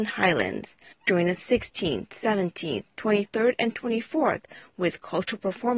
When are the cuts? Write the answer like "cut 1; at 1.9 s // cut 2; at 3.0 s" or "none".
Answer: cut 1; at 0.9 s // cut 2; at 1.4 s // cut 3; at 2.9 s